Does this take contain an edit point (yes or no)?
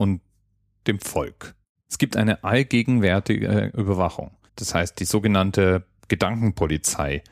yes